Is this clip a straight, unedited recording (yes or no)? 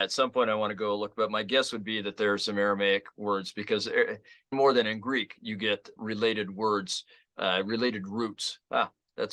no